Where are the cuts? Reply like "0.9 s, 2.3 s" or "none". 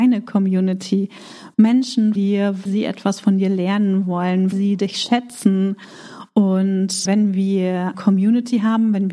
2.2 s, 2.7 s, 4.5 s, 7.1 s, 7.9 s